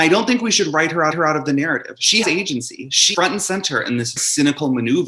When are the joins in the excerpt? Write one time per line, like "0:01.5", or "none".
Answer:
0:01.1
0:02.2
0:03.1
0:04.2